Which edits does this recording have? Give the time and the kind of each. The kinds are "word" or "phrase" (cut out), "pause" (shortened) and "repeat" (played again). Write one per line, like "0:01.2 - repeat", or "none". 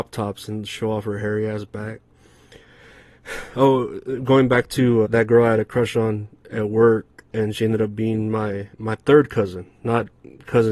0:05.0 - word
0:08.7 - pause